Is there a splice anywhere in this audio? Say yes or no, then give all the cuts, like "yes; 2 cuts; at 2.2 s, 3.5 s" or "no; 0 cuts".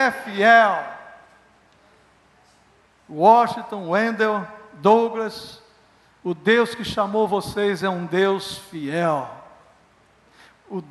no; 0 cuts